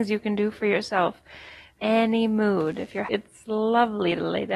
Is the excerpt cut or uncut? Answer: cut